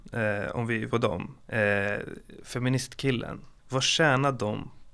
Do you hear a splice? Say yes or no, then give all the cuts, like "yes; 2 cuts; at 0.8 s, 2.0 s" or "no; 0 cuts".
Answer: yes; 3 cuts; at 0.9 s, 1.4 s, 3.6 s